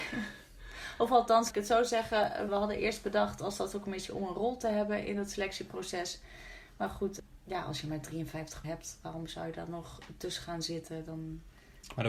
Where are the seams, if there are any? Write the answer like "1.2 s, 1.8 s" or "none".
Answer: 1.5 s, 2.5 s, 8.6 s